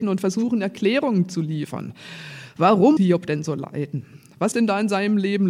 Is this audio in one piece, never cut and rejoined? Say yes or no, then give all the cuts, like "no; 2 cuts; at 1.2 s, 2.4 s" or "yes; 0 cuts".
no; 2 cuts; at 3.0 s, 4.5 s